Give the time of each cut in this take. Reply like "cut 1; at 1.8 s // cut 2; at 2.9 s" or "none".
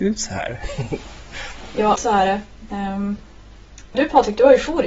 cut 1; at 2.0 s // cut 2; at 3.9 s